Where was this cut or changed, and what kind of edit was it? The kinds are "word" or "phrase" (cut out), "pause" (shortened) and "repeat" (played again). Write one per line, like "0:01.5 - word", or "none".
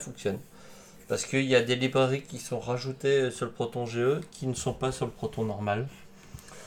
none